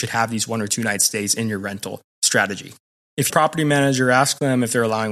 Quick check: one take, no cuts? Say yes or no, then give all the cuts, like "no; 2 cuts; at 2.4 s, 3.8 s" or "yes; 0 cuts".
no; 1 cut; at 3.3 s